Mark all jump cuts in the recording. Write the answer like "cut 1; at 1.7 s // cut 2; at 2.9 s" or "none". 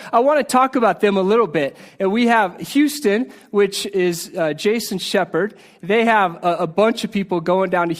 none